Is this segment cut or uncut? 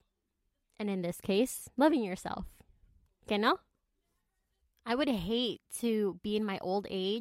cut